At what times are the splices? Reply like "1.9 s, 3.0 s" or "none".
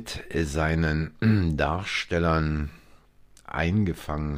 none